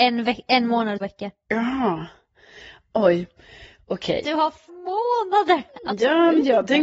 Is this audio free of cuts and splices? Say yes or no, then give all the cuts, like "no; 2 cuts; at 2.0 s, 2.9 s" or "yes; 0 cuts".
no; 2 cuts; at 1.0 s, 4.7 s